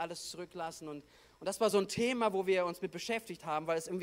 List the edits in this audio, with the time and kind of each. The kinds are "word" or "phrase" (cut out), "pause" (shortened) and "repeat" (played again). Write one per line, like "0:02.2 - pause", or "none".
none

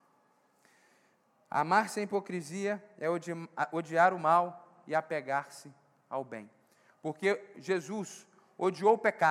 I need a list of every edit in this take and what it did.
none

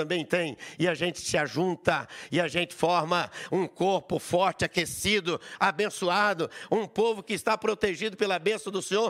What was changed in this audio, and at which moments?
none

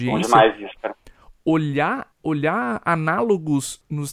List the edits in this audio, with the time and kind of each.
0:02.1 - pause

